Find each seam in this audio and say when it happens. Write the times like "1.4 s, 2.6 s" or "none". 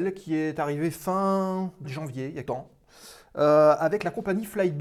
1.8 s, 2.4 s

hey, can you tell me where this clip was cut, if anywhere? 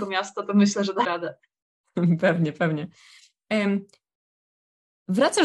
1.0 s

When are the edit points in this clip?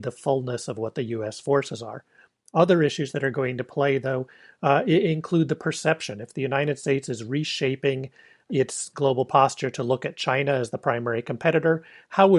none

